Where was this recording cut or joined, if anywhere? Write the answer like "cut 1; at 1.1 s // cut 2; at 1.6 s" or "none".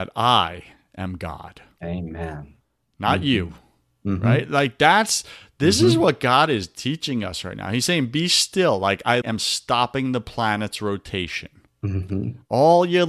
cut 1; at 9.2 s